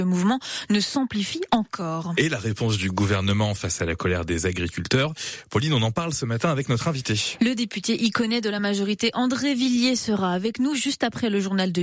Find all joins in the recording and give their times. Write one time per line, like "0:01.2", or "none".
none